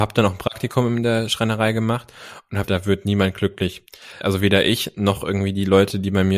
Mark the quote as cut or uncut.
cut